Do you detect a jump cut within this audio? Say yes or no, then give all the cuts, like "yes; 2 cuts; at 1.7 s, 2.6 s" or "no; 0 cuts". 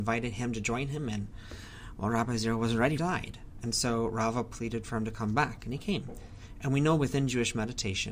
yes; 1 cut; at 3.0 s